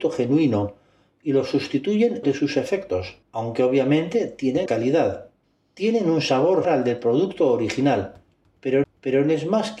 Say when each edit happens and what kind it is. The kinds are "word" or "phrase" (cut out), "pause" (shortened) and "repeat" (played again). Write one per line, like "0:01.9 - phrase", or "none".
0:02.2 - phrase
0:03.2 - pause
0:04.7 - word
0:05.4 - pause
0:06.6 - word
0:08.8 - repeat